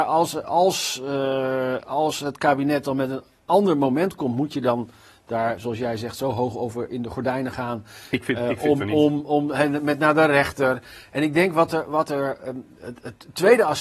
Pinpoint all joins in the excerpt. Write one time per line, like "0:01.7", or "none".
none